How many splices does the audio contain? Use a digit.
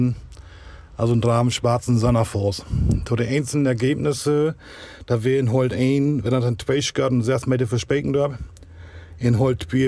0